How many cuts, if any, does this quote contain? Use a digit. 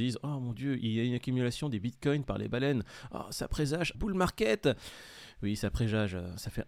1